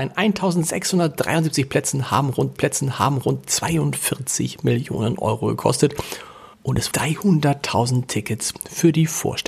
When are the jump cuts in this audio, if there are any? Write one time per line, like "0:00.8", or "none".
0:02.6
0:06.5
0:06.9